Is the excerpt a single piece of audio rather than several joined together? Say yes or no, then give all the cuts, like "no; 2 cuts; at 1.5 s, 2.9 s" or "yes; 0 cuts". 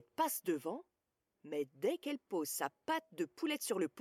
no; 1 cut; at 1.0 s